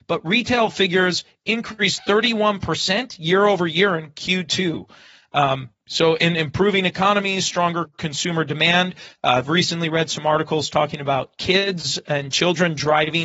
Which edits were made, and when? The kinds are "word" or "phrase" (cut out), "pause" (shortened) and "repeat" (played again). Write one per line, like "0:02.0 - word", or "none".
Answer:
none